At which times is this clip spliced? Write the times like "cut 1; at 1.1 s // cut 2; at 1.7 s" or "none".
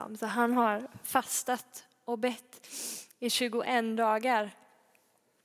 none